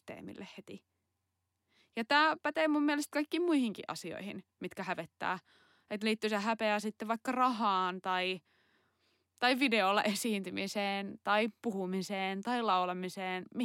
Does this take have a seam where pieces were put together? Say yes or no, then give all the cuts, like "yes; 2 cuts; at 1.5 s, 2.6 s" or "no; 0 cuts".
no; 0 cuts